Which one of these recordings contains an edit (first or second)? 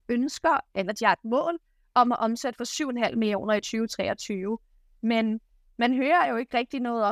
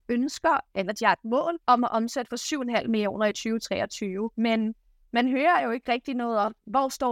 second